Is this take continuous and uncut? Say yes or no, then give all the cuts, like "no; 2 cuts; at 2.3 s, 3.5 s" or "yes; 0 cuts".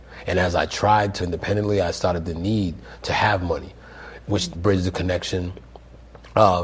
no; 3 cuts; at 1.2 s, 2.2 s, 4.5 s